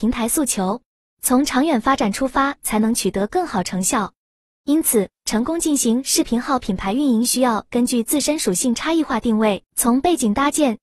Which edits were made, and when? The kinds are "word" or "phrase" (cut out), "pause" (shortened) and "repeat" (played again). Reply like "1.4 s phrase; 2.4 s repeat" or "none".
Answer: 5.2 s pause; 9.7 s pause